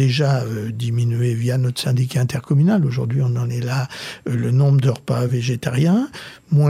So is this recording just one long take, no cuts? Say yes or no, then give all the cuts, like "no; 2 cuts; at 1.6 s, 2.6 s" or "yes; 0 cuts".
yes; 0 cuts